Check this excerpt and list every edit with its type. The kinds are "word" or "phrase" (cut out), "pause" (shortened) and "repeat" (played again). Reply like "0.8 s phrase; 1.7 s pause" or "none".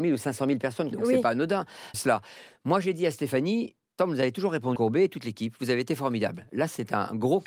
0.9 s word; 1.9 s word; 4.0 s phrase; 4.8 s phrase